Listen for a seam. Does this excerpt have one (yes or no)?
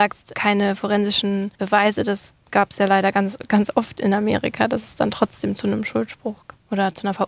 yes